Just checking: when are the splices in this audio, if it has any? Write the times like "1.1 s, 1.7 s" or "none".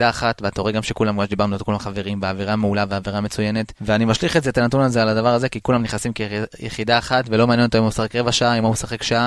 3.8 s